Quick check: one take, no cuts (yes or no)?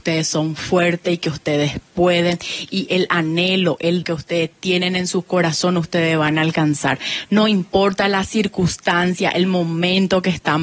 no